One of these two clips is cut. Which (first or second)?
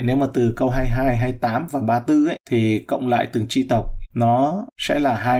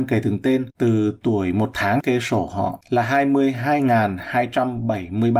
second